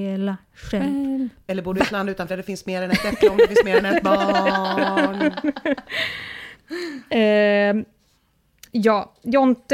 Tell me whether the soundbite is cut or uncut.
cut